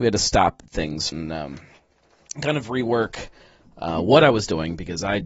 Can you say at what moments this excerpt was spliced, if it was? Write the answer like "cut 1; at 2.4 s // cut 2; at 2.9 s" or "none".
cut 1; at 1.1 s